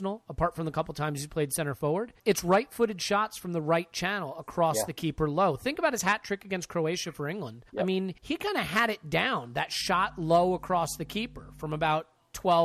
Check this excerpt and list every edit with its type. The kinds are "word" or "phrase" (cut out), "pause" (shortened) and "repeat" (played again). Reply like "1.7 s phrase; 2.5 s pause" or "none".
2.2 s pause; 7.7 s pause; 8.2 s pause